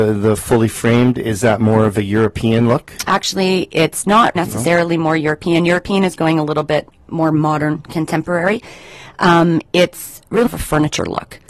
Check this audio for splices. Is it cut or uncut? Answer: cut